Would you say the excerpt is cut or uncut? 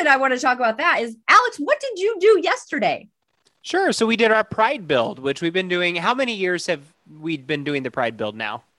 uncut